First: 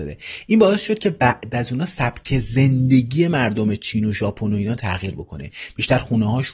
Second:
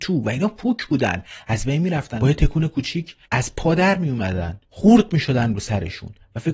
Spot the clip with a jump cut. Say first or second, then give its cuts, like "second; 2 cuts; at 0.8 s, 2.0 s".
second; 2 cuts; at 3.2 s, 4.6 s